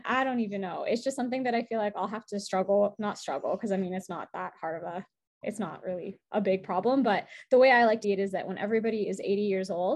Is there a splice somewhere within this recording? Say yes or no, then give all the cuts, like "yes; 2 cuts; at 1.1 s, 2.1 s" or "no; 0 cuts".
yes; 1 cut; at 8.0 s